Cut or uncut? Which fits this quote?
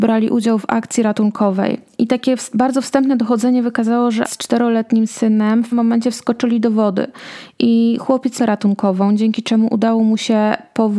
cut